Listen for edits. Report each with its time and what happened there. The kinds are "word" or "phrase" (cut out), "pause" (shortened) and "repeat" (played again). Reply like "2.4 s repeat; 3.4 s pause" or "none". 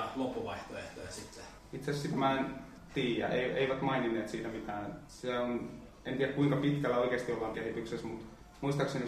7.5 s word